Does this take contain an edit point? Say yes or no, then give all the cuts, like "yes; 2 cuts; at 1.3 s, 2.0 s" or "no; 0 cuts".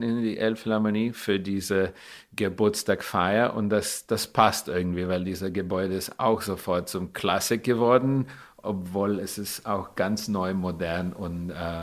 yes; 1 cut; at 4.1 s